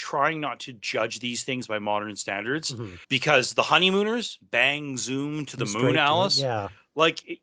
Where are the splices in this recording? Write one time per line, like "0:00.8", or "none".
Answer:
0:03.0